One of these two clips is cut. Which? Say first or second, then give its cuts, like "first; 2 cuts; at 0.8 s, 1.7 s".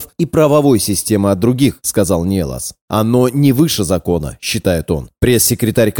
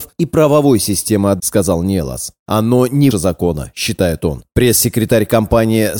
second; 2 cuts; at 1.4 s, 3.1 s